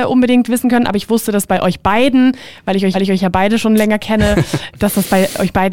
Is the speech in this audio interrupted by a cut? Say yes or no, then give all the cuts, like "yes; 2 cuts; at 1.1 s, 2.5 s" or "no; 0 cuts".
yes; 1 cut; at 2.9 s